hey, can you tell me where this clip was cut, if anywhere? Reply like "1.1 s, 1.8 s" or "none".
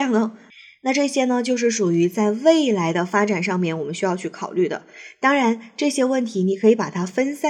none